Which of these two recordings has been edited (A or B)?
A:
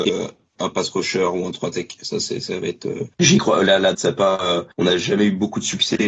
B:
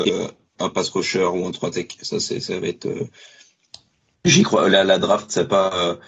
A